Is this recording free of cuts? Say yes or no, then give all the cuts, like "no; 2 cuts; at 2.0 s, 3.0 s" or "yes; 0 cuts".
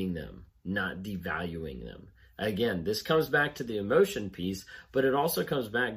yes; 0 cuts